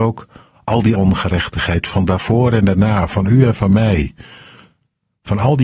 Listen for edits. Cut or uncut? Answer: cut